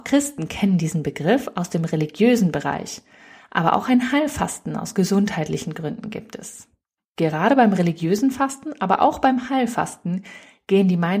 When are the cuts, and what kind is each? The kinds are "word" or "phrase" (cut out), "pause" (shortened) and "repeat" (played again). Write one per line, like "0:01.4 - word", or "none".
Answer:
none